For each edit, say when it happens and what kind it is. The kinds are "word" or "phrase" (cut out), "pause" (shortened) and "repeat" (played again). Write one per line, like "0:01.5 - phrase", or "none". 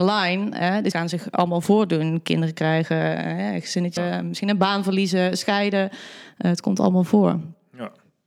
0:00.9 - word
0:04.0 - word